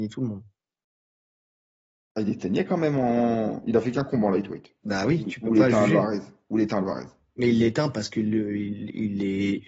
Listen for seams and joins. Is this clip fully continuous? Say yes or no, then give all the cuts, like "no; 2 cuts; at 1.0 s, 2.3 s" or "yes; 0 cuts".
yes; 0 cuts